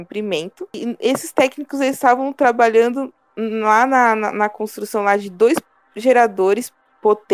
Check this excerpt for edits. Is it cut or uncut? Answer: uncut